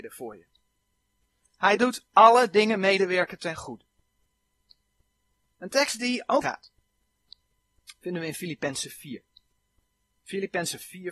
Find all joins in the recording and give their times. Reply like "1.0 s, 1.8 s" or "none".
6.4 s

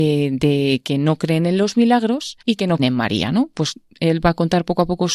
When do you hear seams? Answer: 2.4 s, 2.8 s

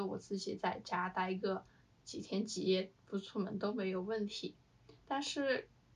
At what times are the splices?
none

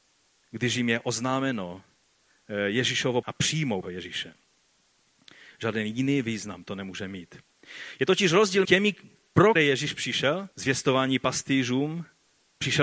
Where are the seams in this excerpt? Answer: 3.2 s, 3.8 s, 8.6 s, 9.6 s, 10.5 s

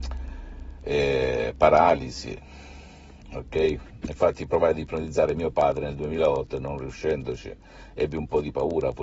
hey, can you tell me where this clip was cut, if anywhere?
none

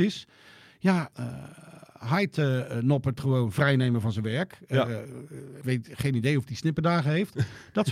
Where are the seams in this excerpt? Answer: 1.1 s, 3.2 s, 5.6 s

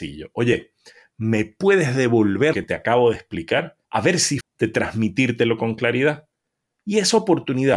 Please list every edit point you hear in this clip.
2.5 s, 3.8 s, 4.4 s

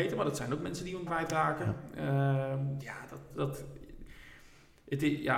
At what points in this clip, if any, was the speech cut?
1.1 s, 2.8 s, 3.3 s

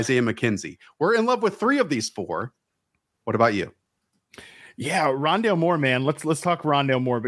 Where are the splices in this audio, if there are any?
none

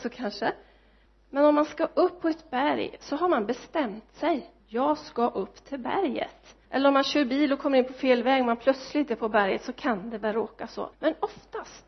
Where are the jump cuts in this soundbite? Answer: 1.1 s, 4.6 s, 6.6 s, 10.9 s

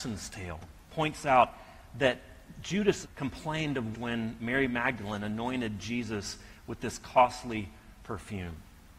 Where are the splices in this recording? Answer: 3.0 s, 3.9 s

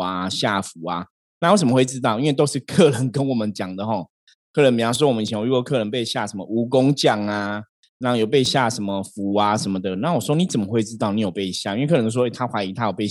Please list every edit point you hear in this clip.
none

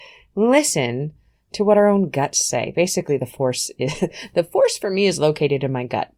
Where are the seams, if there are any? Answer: none

